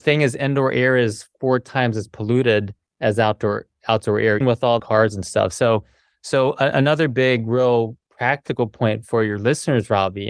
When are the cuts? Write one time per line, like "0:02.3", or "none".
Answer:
0:04.4
0:04.8